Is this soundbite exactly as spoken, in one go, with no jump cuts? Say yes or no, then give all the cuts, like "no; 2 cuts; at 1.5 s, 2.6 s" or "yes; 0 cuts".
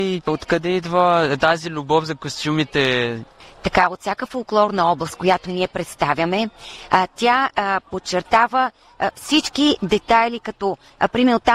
yes; 0 cuts